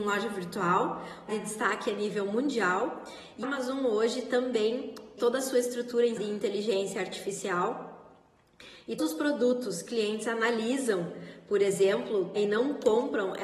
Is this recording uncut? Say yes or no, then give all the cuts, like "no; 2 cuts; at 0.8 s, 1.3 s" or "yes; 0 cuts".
no; 7 cuts; at 1.3 s, 3.4 s, 5.2 s, 6.2 s, 9.0 s, 9.9 s, 12.4 s